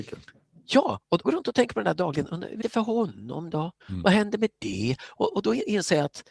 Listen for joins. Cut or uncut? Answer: cut